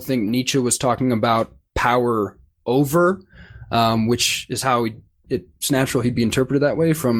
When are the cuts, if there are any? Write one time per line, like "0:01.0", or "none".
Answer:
none

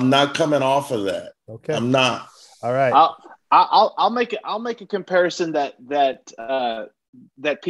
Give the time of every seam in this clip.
none

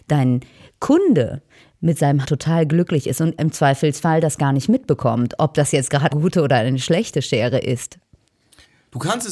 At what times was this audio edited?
0:02.2
0:03.4
0:06.1

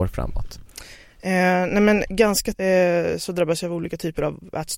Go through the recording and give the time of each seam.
0:02.5

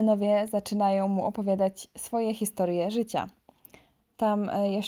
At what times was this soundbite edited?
none

